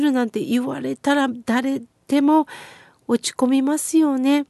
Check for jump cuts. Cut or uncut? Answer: uncut